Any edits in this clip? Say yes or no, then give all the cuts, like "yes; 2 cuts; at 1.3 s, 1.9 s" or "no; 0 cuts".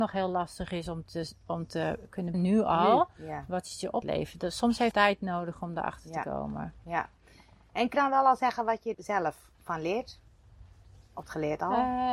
yes; 6 cuts; at 2.3 s, 4.0 s, 4.9 s, 7.9 s, 8.9 s, 11.2 s